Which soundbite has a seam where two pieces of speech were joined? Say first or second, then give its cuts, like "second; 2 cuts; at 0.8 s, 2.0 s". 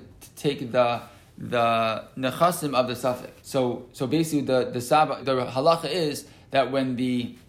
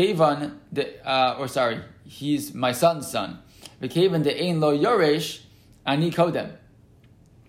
first; 2 cuts; at 3.4 s, 5.2 s